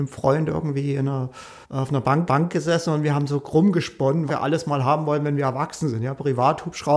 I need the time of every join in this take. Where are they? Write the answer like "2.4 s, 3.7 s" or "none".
1.6 s, 2.3 s, 4.3 s